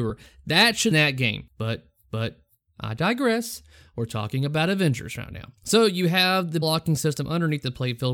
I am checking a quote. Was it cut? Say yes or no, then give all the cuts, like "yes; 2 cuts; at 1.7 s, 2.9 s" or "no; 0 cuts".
yes; 3 cuts; at 0.9 s, 2.0 s, 6.6 s